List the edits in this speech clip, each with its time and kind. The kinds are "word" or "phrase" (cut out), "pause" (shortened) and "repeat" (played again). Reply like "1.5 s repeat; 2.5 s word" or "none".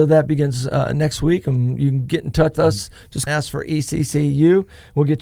2.5 s word; 3.3 s phrase